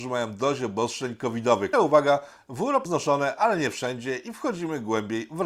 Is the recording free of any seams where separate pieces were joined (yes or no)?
no